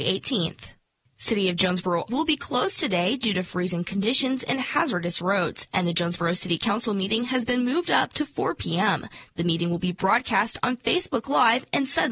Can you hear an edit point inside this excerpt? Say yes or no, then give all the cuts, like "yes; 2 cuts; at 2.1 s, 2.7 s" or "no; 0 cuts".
yes; 1 cut; at 2.1 s